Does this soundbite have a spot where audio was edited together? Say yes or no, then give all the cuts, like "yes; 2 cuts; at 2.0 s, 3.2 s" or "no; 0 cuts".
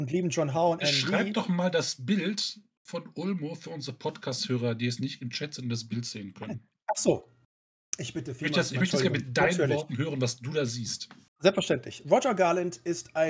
no; 0 cuts